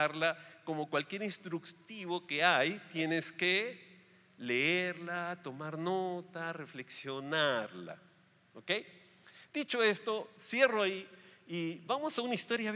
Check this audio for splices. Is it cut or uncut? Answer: uncut